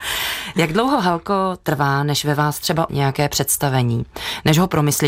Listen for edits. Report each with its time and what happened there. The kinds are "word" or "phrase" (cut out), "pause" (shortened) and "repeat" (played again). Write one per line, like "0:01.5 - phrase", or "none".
0:02.9 - word